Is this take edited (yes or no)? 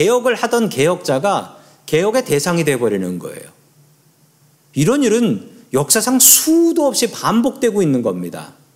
no